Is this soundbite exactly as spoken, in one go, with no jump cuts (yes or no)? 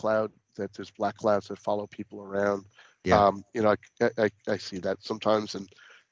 yes